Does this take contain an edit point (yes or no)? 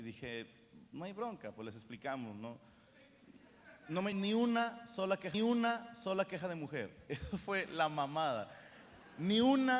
yes